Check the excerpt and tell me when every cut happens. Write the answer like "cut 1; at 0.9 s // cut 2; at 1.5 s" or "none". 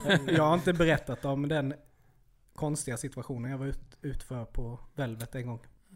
none